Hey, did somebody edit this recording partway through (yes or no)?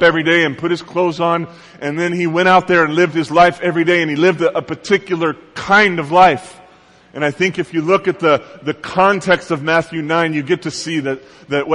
no